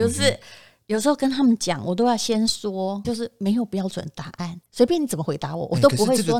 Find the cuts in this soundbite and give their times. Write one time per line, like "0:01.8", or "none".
0:03.0
0:04.7